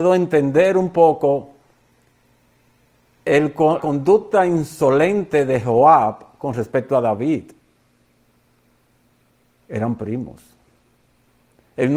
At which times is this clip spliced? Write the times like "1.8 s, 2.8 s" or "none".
3.8 s

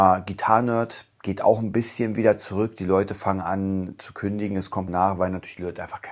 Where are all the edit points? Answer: 4.9 s

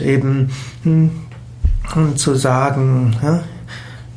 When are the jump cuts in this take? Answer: none

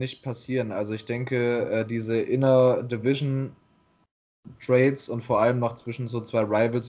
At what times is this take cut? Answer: none

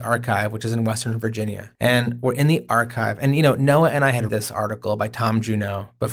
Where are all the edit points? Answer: 1.7 s, 4.3 s

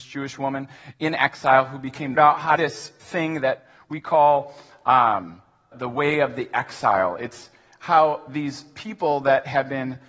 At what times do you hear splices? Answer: 2.1 s, 2.6 s, 5.7 s

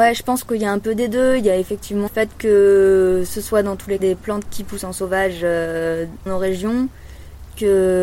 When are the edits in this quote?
2.1 s, 4.0 s, 4.4 s, 6.3 s

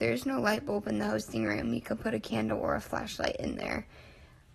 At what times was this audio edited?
none

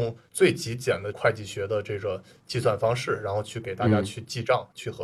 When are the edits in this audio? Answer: none

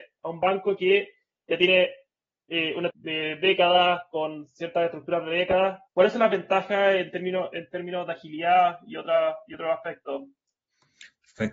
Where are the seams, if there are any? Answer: 2.9 s, 5.9 s

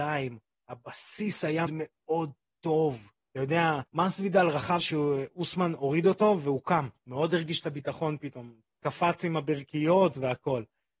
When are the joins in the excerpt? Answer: 1.7 s, 3.2 s, 3.9 s, 4.8 s, 7.0 s, 8.7 s

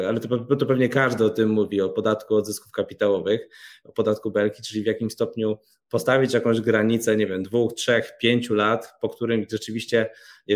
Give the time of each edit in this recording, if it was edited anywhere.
none

